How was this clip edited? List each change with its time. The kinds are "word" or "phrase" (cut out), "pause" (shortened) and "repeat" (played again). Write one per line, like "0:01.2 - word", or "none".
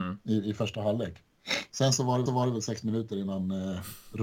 0:02.3 - repeat